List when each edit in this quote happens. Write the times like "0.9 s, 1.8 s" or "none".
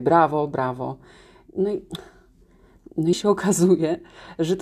3.1 s